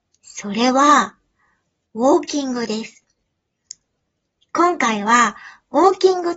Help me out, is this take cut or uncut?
uncut